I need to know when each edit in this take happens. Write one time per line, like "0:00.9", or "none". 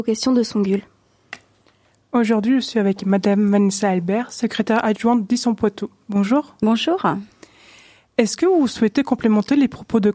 none